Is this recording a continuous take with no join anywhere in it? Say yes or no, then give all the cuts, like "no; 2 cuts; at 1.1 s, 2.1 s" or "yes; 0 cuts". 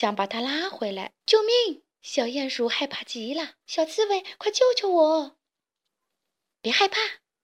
no; 3 cuts; at 1.2 s, 1.9 s, 3.6 s